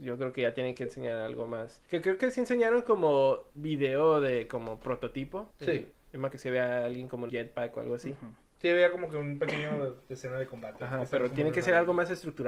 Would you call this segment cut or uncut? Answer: cut